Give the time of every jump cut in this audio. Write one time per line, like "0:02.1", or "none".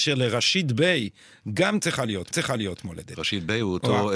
0:02.3